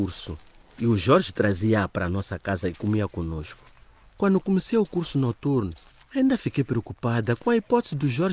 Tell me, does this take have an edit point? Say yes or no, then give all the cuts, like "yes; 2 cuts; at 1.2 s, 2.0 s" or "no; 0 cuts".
no; 0 cuts